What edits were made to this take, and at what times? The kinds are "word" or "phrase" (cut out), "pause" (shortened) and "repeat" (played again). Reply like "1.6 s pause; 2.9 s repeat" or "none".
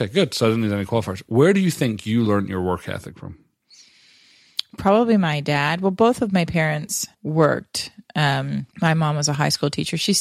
7.1 s pause; 8.7 s pause